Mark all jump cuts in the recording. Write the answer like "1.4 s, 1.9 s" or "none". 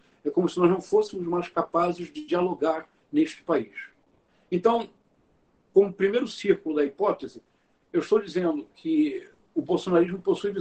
none